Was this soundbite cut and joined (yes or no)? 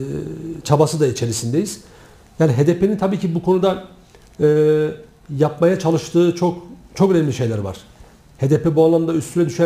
no